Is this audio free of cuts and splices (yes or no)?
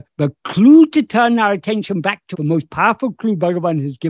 no